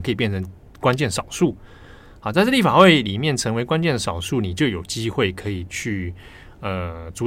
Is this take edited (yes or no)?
no